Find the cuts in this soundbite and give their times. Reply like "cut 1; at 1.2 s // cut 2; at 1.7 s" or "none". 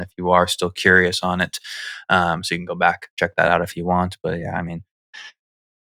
none